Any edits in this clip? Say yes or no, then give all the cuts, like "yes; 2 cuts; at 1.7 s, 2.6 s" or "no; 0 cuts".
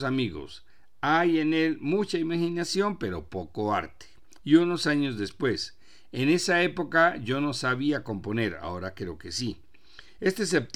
no; 0 cuts